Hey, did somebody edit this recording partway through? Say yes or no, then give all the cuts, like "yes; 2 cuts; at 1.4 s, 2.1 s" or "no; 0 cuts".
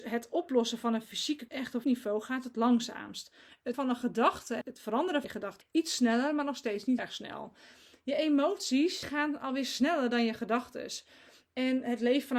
yes; 8 cuts; at 1.5 s, 1.8 s, 3.7 s, 4.6 s, 5.2 s, 5.6 s, 7.0 s, 9.0 s